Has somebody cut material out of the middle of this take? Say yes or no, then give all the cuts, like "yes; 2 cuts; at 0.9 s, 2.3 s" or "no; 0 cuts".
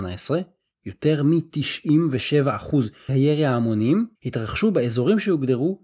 yes; 2 cuts; at 3.1 s, 4.2 s